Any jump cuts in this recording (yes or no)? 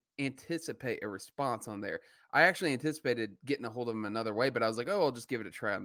no